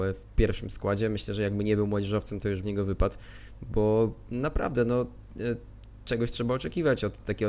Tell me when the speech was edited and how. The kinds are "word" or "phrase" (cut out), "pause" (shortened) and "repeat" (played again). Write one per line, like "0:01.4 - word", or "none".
0:02.6 - phrase